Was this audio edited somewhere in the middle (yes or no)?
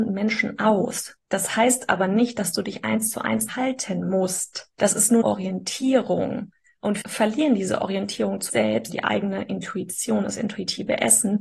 yes